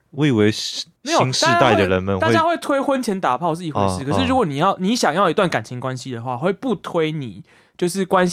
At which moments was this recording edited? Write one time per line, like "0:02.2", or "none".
0:01.0